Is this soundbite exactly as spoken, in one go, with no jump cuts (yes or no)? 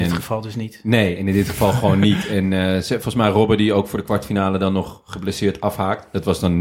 yes